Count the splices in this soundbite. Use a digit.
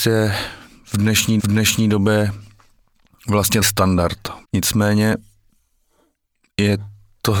3